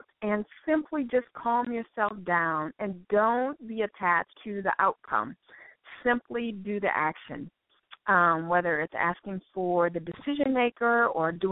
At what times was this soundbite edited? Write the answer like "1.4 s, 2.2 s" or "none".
4.3 s